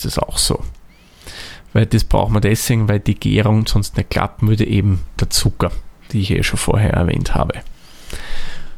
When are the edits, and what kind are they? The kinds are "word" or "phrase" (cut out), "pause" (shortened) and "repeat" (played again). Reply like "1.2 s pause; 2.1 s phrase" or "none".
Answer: 5.2 s word